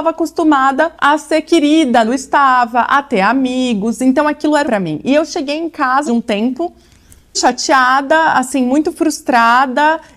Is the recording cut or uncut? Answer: cut